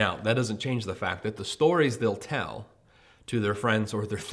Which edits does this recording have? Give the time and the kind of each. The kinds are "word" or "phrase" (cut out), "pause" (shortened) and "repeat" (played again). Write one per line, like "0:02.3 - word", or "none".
none